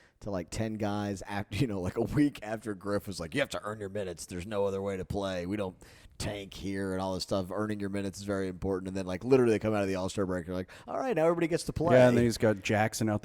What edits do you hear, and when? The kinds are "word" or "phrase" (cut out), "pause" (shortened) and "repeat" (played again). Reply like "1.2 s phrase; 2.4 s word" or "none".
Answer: none